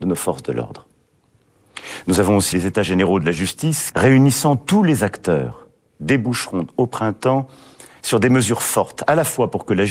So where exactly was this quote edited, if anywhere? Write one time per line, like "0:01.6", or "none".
0:02.5
0:03.9